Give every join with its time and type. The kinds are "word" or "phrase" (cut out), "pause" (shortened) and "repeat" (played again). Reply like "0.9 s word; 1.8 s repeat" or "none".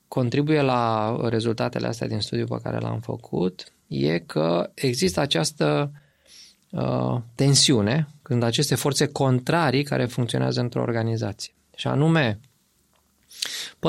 none